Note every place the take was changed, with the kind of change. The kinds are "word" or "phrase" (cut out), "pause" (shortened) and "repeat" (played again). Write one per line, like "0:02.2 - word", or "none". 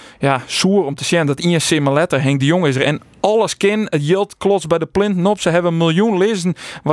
none